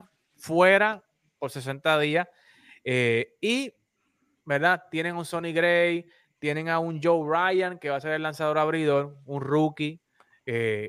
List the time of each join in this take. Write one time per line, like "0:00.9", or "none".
none